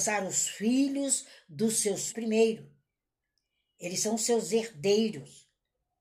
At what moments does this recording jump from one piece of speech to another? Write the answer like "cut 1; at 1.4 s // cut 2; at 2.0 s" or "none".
cut 1; at 2.1 s